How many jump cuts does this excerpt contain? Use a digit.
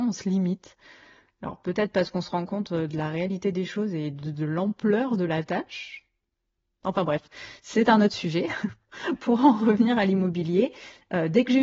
0